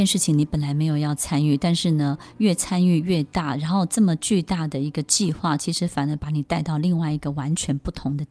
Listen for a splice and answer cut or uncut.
uncut